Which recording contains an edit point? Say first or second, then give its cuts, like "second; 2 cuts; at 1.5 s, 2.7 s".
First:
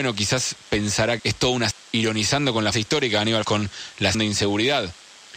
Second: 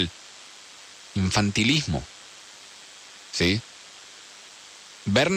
first; 5 cuts; at 1.2 s, 1.7 s, 2.7 s, 3.4 s, 4.1 s